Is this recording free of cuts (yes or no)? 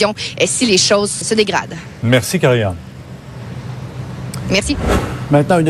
no